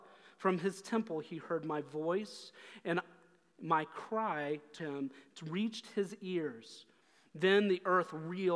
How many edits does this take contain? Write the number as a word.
one